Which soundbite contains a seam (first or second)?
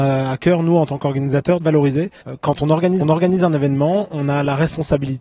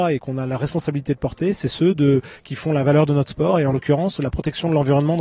first